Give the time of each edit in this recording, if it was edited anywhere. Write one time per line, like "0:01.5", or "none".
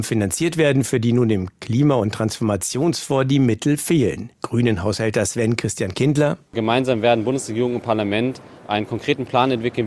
0:04.3